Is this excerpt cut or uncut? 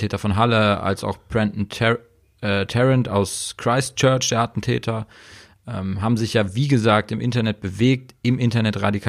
uncut